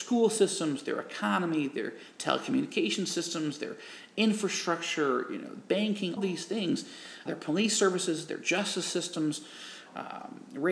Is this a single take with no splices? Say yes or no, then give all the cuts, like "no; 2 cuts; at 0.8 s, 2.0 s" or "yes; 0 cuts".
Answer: no; 2 cuts; at 6.2 s, 7.3 s